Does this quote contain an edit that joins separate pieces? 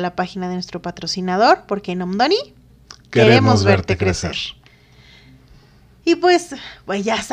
no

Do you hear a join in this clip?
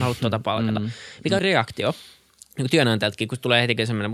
yes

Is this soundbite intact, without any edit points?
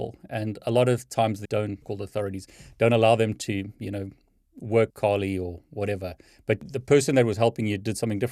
no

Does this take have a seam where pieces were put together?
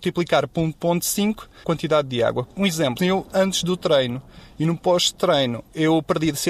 yes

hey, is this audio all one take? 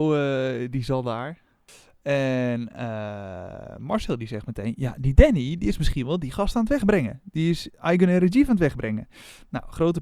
yes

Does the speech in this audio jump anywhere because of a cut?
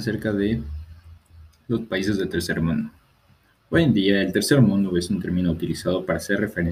no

